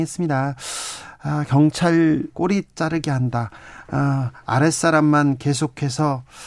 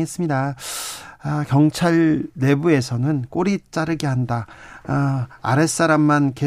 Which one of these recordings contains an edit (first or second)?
first